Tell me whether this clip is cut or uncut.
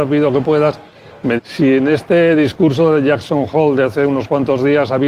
cut